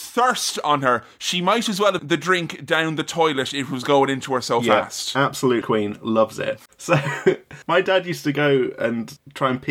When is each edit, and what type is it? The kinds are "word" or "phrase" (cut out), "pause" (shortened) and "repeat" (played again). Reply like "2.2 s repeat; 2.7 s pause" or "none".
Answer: 2.0 s phrase; 5.6 s phrase; 6.7 s pause; 7.6 s pause